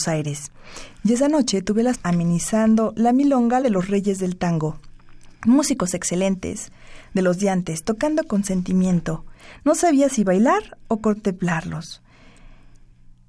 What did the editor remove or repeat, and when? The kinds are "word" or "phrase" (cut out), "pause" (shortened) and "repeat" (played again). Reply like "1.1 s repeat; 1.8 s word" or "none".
1.9 s phrase; 3.6 s phrase